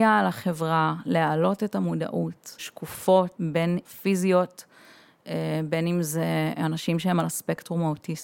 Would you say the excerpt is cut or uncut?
cut